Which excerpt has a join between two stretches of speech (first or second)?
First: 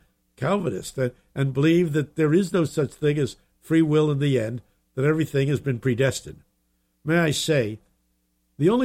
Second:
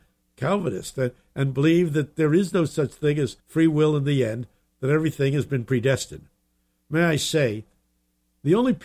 second